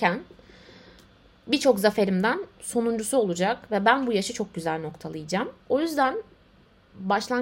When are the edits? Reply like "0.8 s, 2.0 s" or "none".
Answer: 5.6 s

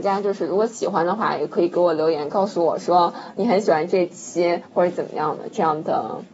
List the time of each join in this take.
4.6 s

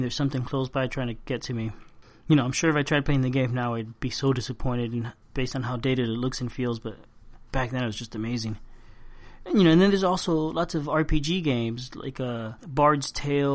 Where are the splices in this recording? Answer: 5.2 s, 12.6 s

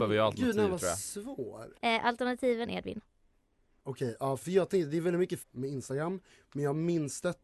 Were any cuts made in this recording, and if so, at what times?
1.8 s, 2.6 s, 4.4 s, 5.4 s

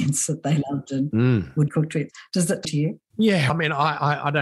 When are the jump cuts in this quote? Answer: 1.7 s, 2.6 s, 3.5 s

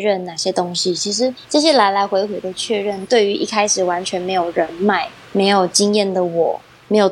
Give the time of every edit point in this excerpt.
1.4 s, 5.2 s

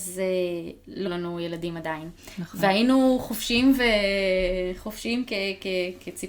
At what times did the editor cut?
1.1 s

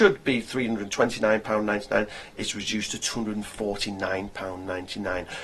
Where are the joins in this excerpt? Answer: none

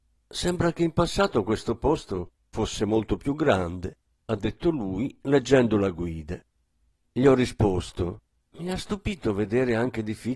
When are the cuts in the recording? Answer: none

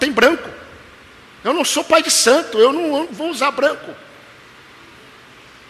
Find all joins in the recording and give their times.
3.0 s

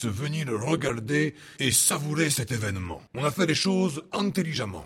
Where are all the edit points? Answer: 3.1 s

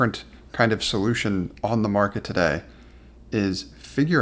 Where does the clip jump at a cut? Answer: none

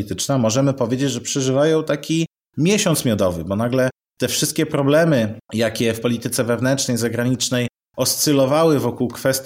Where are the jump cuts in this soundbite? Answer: none

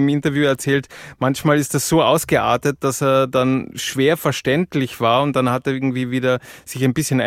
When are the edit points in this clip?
none

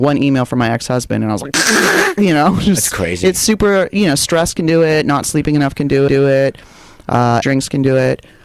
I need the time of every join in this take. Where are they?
6.1 s, 7.4 s

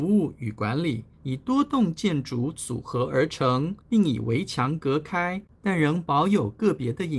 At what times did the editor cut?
1.1 s, 3.8 s, 5.5 s

